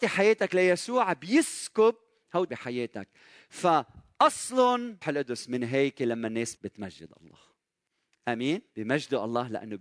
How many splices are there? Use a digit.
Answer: 4